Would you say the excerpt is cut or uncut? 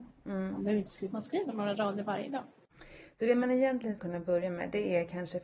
cut